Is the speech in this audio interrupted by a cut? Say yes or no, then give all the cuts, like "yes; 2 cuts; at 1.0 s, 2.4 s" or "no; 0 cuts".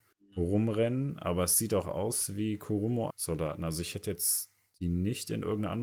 yes; 1 cut; at 3.1 s